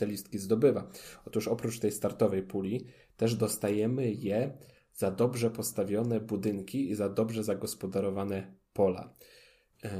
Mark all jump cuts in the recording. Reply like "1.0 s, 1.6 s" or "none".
none